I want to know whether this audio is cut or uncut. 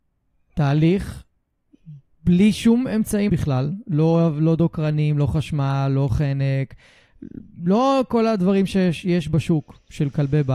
cut